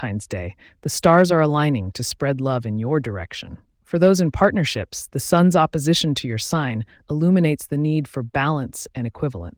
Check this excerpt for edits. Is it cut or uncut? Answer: uncut